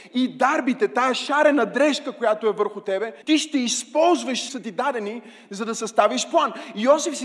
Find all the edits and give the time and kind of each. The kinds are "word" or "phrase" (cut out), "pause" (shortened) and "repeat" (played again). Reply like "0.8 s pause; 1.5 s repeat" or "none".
3.2 s pause; 4.5 s phrase